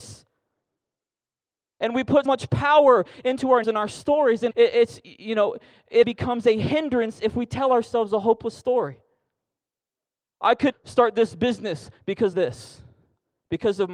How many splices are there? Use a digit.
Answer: 6